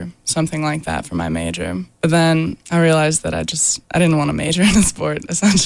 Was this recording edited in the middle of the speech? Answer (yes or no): yes